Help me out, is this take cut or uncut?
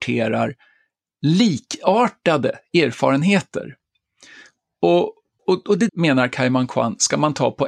cut